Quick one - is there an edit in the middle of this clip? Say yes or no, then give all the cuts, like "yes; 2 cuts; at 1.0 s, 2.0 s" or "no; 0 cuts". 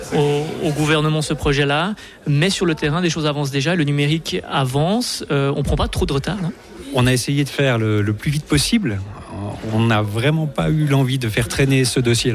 no; 0 cuts